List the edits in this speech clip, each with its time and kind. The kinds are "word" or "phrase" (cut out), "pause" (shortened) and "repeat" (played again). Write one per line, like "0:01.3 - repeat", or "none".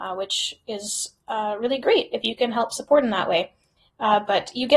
none